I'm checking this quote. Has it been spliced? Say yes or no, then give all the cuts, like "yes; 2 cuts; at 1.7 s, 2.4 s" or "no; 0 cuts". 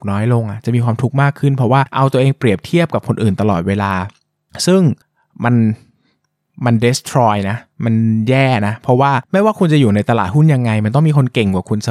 no; 0 cuts